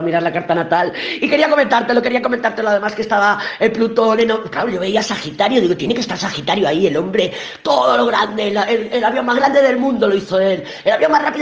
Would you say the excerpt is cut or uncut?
uncut